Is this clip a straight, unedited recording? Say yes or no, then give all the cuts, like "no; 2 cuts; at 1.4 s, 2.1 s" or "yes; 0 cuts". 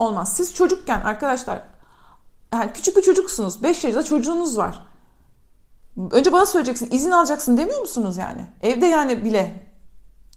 yes; 0 cuts